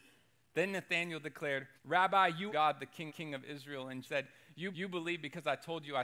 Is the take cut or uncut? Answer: cut